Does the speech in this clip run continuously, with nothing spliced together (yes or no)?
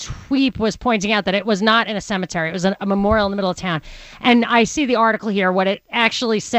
yes